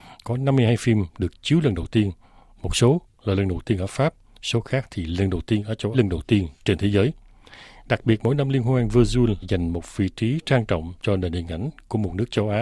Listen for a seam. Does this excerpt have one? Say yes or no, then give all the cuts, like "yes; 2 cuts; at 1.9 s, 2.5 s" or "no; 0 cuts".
yes; 3 cuts; at 5.9 s, 9.4 s, 11.0 s